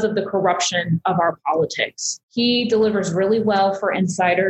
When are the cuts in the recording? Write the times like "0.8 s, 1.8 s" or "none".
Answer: 2.2 s